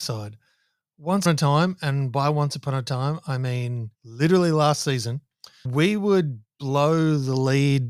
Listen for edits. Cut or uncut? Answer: cut